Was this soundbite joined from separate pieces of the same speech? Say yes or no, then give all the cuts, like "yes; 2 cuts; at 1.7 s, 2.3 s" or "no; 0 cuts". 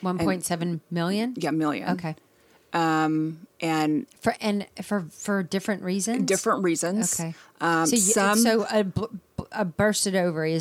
yes; 1 cut; at 4.4 s